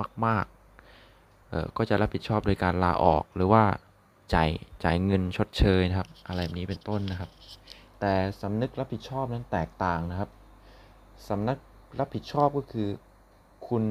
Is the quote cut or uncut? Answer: uncut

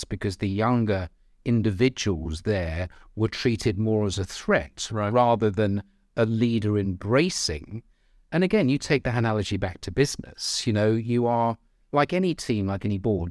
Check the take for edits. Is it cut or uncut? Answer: uncut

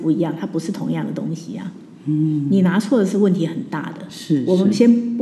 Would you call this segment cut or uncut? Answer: uncut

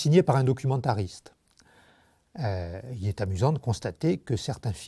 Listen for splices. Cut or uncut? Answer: uncut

